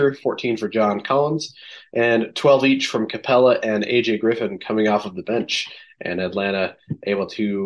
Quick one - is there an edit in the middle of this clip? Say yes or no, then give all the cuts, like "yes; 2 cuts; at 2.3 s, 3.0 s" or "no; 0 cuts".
no; 0 cuts